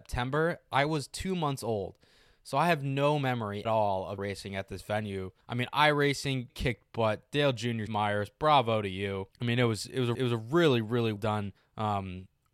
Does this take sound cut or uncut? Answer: cut